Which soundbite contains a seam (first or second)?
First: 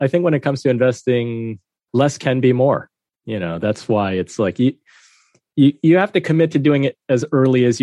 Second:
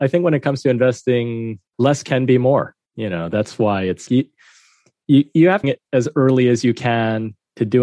second